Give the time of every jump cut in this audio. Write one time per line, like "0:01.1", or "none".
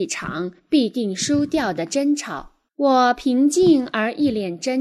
0:02.7